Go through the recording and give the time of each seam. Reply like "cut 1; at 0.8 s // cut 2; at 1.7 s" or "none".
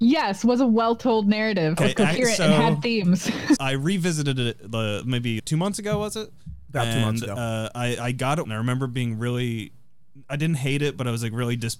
cut 1; at 1.8 s // cut 2; at 3.6 s // cut 3; at 5.4 s // cut 4; at 8.4 s